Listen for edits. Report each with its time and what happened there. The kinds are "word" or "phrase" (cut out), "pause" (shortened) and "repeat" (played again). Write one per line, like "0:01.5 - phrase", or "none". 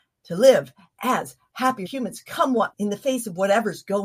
0:01.8 - word
0:02.7 - word

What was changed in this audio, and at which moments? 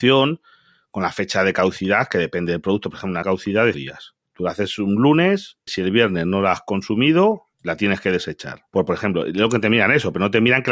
0:03.2 - phrase
0:03.7 - word
0:04.3 - pause
0:05.7 - word
0:07.5 - pause
0:08.7 - pause

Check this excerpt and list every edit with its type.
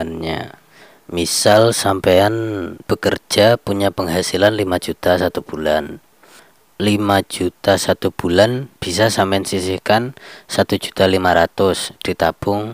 0:02.8 - pause
0:08.7 - pause

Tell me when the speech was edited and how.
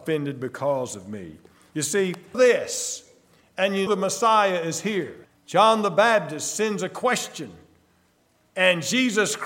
0:02.3 - phrase
0:03.9 - word
0:05.2 - pause

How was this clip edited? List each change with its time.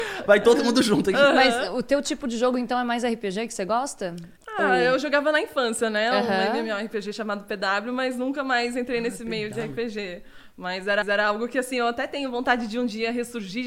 0:04.4 - pause
0:11.0 - repeat

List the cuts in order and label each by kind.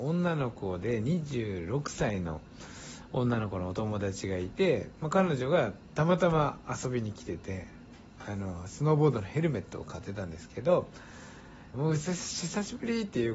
0:11.7 - phrase

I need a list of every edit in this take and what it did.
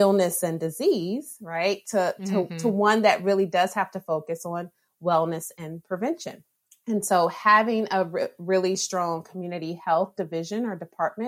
0:06.6 - pause

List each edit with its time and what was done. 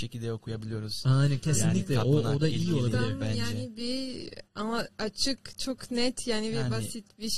0:04.5 - pause

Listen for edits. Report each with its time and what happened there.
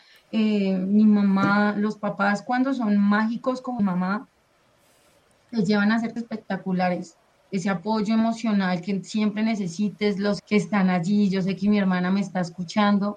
0:03.8 - word
0:06.2 - word
0:10.4 - word

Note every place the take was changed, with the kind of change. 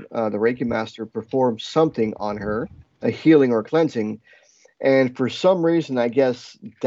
none

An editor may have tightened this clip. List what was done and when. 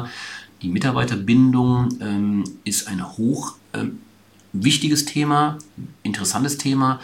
none

